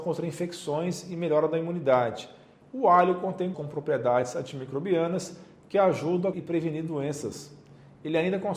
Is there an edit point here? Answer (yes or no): yes